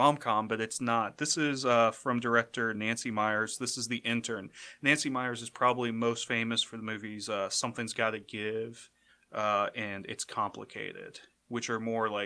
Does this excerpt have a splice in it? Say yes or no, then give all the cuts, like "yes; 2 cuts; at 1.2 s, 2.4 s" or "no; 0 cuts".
no; 0 cuts